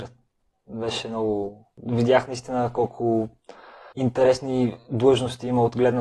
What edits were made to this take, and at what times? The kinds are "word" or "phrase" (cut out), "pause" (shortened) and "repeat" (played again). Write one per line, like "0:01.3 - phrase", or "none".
0:03.9 - pause